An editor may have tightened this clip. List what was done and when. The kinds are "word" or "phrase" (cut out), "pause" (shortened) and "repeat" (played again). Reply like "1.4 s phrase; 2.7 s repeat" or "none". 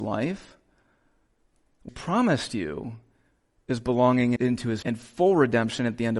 1.9 s word; 4.4 s word; 4.8 s word